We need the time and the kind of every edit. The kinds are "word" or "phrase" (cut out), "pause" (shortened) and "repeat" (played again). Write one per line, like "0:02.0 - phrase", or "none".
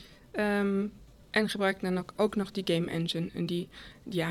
none